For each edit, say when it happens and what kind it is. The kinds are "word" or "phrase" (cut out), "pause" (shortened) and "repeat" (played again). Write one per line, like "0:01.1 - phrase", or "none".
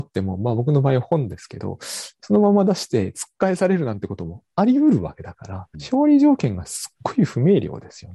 0:05.7 - phrase